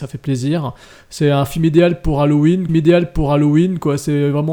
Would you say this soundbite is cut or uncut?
cut